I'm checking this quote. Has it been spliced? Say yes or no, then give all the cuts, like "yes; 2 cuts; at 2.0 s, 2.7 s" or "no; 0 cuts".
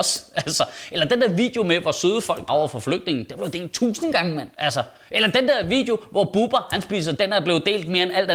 yes; 3 cuts; at 2.5 s, 4.5 s, 7.2 s